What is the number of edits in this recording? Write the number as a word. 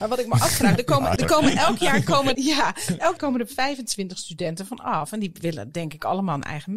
three